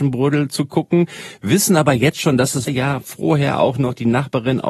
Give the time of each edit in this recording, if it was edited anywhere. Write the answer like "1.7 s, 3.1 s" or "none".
2.7 s